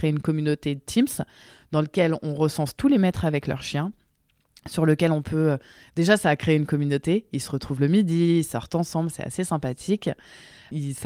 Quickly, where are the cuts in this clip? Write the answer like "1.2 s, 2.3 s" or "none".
none